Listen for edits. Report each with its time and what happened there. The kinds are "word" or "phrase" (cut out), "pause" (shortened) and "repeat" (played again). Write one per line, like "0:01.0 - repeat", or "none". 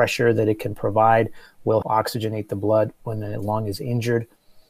0:01.8 - word